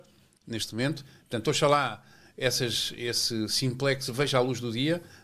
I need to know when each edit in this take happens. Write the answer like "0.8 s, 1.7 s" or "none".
none